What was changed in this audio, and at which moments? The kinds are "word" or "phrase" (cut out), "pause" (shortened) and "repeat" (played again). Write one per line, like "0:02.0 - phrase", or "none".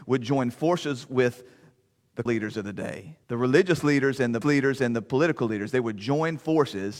0:02.3 - word
0:03.2 - pause
0:04.4 - repeat